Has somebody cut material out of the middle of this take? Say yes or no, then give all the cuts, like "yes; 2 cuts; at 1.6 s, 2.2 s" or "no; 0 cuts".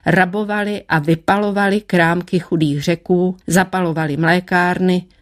yes; 1 cut; at 3.4 s